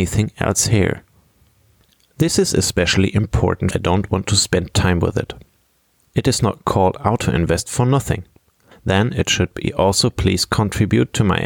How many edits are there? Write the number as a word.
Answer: one